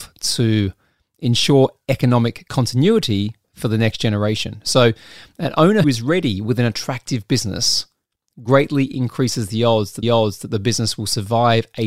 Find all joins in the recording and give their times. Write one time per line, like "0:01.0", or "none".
0:05.8
0:10.0